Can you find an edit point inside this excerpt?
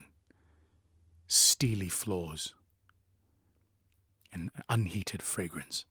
no; 0 cuts

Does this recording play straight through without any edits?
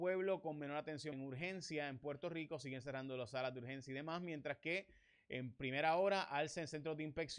no; 1 cut; at 1.1 s

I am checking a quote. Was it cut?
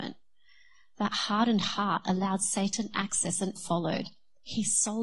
yes; 1 cut; at 3.6 s

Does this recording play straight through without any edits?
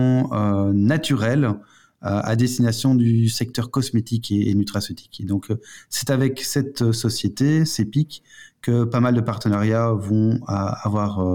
yes; 0 cuts

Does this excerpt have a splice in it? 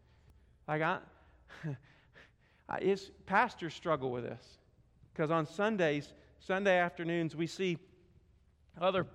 no; 0 cuts

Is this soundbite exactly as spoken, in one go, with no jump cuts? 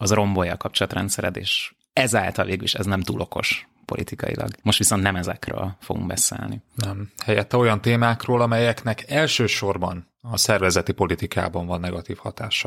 no; 1 cut; at 4.6 s

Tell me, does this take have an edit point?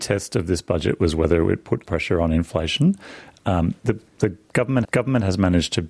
yes; 3 cuts; at 1.8 s, 3.8 s, 4.8 s

